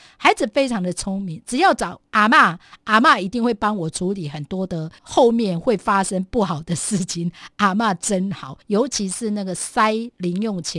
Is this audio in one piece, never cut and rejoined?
no; 2 cuts; at 5.0 s, 8.6 s

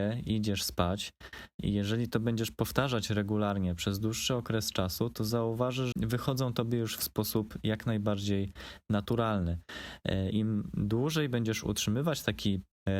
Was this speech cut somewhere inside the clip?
yes; 2 cuts; at 5.9 s, 10.3 s

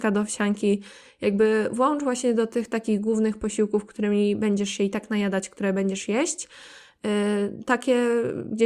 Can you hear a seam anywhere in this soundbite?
no; 0 cuts

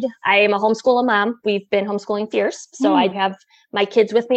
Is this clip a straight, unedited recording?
no; 2 cuts; at 2.3 s, 3.1 s

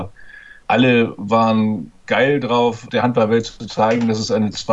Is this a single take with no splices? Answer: no; 1 cut; at 2.0 s

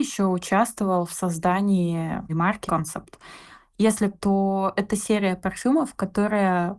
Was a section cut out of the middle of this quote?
yes; 3 cuts; at 2.3 s, 2.7 s, 4.1 s

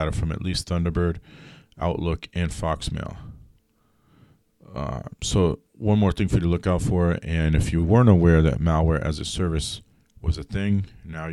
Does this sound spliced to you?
no; 0 cuts

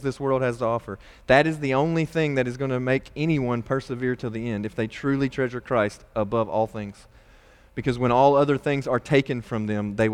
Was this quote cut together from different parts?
no; 0 cuts

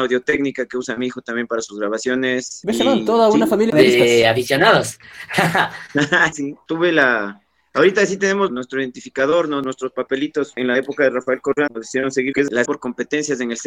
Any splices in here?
yes; 6 cuts; at 3.7 s, 6.3 s, 8.5 s, 11.7 s, 12.3 s, 12.6 s

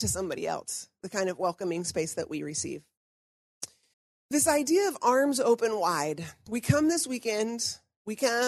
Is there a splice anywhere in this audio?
yes; 1 cut; at 3.9 s

